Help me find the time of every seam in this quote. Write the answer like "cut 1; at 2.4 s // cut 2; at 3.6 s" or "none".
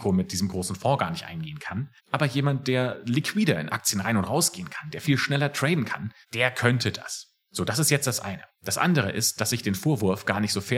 cut 1; at 2.0 s // cut 2; at 6.2 s // cut 3; at 8.5 s